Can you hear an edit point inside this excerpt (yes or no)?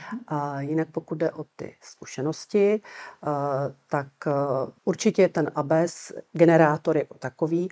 yes